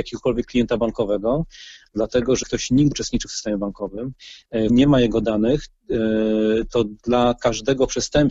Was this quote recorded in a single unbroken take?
no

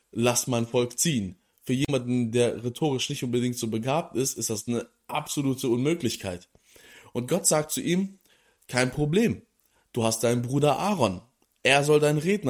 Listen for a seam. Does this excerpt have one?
no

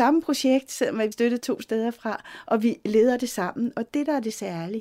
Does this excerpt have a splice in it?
yes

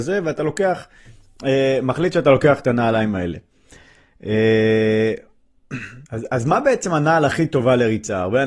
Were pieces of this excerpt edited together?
yes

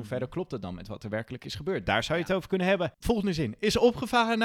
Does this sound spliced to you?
yes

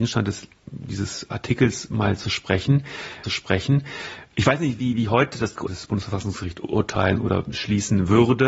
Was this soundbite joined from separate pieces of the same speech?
yes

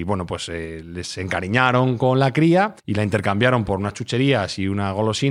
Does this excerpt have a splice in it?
yes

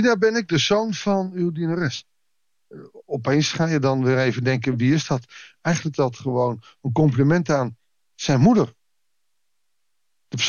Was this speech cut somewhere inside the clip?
yes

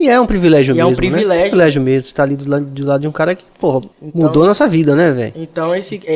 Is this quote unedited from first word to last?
no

